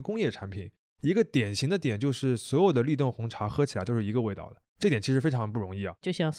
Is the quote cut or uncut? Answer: uncut